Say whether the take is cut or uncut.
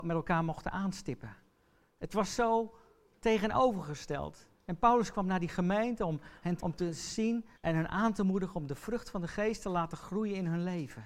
cut